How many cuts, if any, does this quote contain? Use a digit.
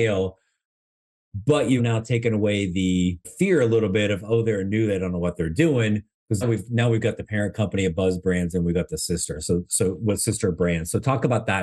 3